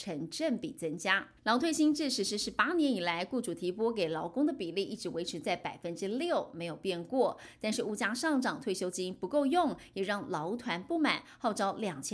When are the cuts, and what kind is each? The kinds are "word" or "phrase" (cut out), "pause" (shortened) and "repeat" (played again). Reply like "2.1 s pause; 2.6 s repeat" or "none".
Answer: 1.4 s pause